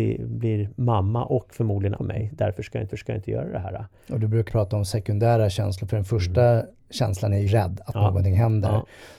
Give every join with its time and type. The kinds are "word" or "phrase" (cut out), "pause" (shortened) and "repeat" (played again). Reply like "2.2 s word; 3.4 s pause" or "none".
2.0 s phrase; 2.9 s repeat; 4.5 s word; 7.5 s word

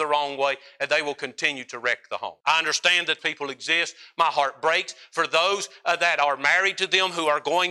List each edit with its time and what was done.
2.4 s pause; 3.2 s word

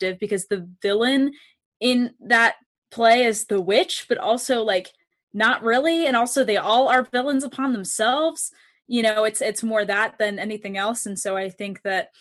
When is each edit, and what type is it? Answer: none

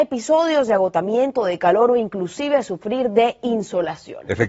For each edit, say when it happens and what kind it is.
none

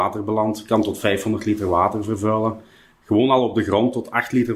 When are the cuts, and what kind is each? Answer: none

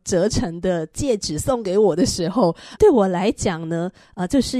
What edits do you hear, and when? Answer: 2.8 s word

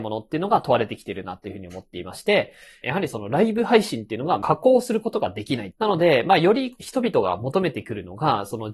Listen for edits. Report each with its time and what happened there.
none

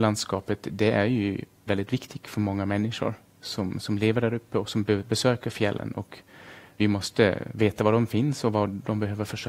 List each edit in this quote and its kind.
1.7 s word; 6.8 s word

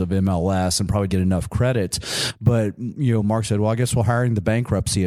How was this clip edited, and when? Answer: 1.1 s word

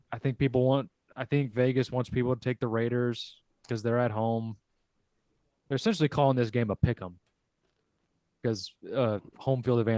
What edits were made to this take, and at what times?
none

